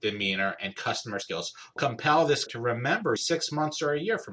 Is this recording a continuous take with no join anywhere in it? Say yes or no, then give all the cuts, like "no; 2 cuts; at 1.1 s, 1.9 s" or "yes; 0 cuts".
no; 4 cuts; at 1.2 s, 1.8 s, 2.5 s, 3.2 s